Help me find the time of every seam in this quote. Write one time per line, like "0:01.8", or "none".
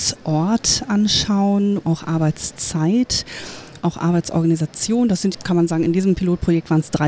0:01.8
0:03.8
0:05.3